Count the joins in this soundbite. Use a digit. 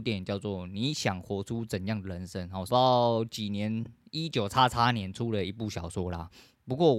1